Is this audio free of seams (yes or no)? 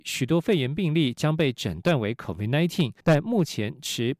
no